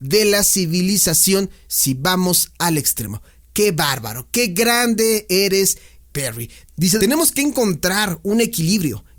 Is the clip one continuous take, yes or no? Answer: no